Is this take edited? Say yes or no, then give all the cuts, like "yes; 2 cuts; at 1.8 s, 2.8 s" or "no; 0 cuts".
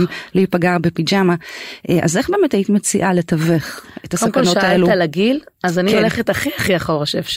no; 0 cuts